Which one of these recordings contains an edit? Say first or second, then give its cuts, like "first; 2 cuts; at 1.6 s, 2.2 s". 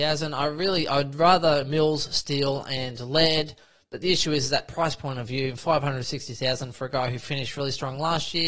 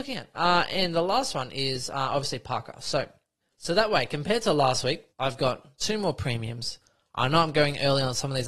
second; 2 cuts; at 3.4 s, 5.1 s